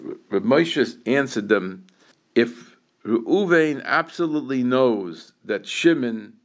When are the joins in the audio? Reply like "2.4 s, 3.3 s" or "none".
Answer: 2.1 s